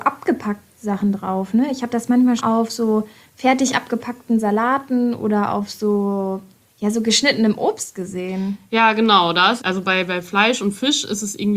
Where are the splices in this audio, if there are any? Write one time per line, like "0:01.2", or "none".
0:02.4
0:09.6